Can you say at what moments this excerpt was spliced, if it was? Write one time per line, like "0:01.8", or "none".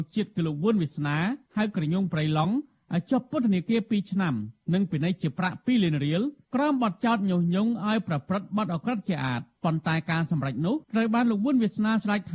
0:01.5
0:10.8